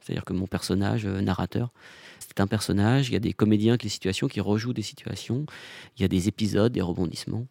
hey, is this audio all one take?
no; 2 cuts; at 2.2 s, 3.8 s

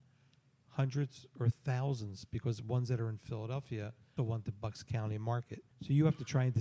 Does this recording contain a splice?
yes; 2 cuts; at 4.2 s, 5.7 s

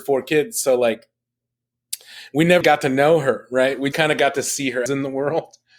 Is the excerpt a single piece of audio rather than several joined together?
no; 3 cuts; at 2.6 s, 3.9 s, 4.9 s

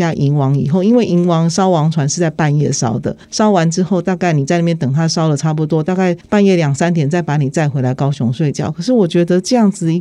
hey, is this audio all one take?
no; 2 cuts; at 3.2 s, 6.2 s

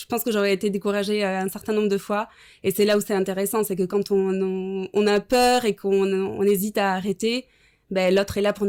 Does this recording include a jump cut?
no; 0 cuts

